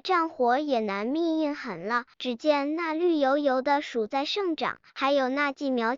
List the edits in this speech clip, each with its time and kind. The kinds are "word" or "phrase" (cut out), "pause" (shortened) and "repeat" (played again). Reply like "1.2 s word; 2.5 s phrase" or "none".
2.1 s pause; 4.9 s pause